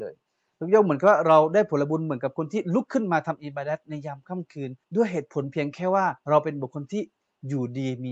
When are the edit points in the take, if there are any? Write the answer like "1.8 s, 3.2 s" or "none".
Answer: 4.8 s, 6.2 s